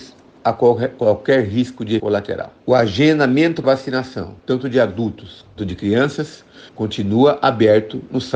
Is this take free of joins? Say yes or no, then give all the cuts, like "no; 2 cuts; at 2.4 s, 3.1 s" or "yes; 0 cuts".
no; 6 cuts; at 2.0 s, 2.6 s, 3.6 s, 4.4 s, 5.6 s, 6.7 s